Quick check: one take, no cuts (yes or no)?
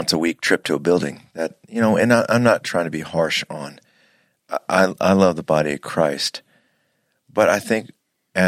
yes